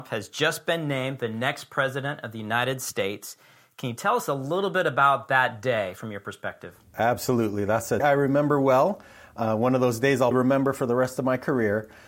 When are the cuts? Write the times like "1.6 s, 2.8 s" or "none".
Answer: 8.0 s, 10.3 s